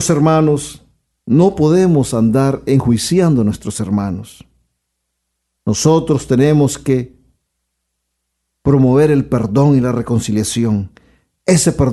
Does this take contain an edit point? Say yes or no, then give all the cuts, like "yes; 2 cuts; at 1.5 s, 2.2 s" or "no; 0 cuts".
no; 0 cuts